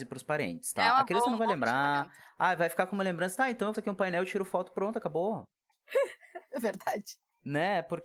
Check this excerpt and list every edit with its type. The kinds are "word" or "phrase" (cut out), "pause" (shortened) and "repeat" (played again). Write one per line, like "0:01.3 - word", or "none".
0:03.7 - word